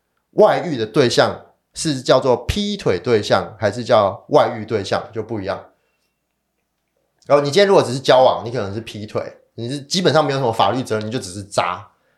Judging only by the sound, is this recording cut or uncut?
uncut